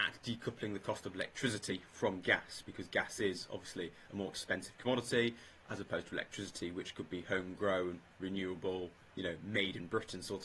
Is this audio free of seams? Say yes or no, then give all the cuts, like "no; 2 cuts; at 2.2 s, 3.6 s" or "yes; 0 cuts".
yes; 0 cuts